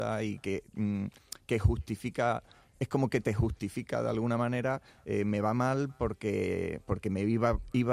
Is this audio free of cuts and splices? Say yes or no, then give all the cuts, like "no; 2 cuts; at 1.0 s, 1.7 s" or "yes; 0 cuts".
yes; 0 cuts